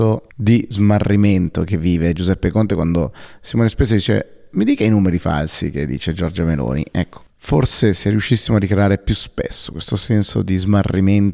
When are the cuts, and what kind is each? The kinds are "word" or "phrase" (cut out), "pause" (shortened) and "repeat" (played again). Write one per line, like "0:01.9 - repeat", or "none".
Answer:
none